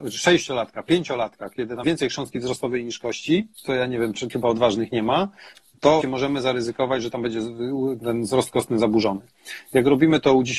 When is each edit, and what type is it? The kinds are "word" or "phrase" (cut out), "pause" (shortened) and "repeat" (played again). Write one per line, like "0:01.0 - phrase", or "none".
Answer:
0:01.8 - word
0:03.5 - pause
0:04.3 - word
0:06.0 - word

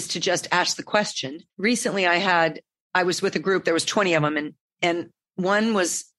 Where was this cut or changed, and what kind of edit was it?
0:01.5 - pause

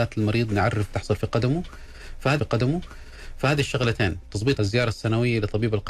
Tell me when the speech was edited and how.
0:00.9 - phrase
0:02.4 - repeat
0:04.6 - word

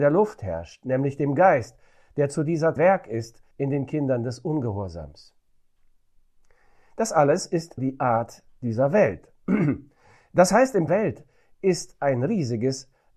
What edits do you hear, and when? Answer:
0:02.8 - phrase
0:03.5 - pause
0:07.8 - word
0:10.9 - phrase

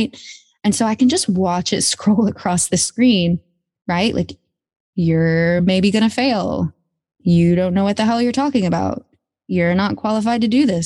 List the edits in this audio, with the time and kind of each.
none

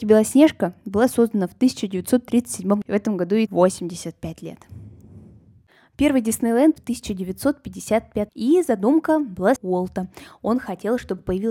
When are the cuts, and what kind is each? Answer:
0:02.8 - word
0:03.5 - word
0:06.8 - word
0:08.3 - word
0:09.6 - word

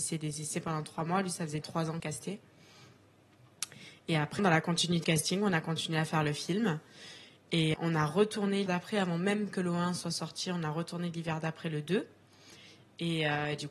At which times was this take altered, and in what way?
0:01.6 - word
0:02.0 - word
0:04.4 - word
0:05.0 - word
0:07.7 - word
0:08.7 - word

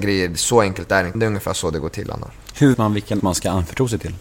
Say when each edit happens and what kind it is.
0:01.1 - word
0:02.7 - word
0:03.2 - word

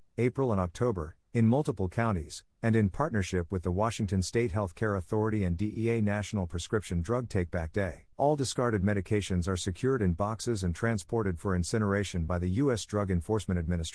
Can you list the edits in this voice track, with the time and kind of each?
0:08.1 - pause

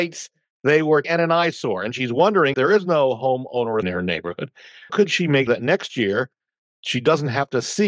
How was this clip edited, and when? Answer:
0:01.0 - word
0:02.5 - word
0:03.8 - word
0:04.9 - word
0:05.5 - word

